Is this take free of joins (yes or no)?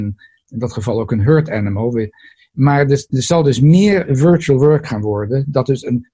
yes